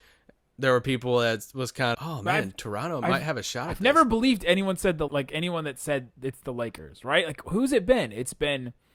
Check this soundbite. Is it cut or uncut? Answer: cut